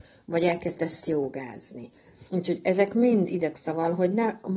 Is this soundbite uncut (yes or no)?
no